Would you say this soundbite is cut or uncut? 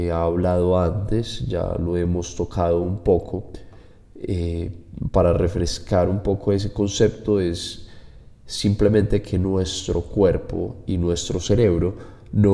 uncut